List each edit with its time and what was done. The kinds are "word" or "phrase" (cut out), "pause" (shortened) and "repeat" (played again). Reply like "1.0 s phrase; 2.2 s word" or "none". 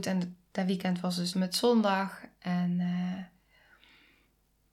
1.3 s word